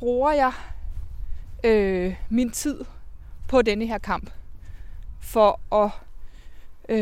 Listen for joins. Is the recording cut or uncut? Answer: uncut